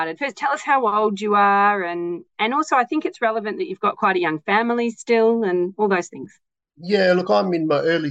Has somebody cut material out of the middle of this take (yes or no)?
no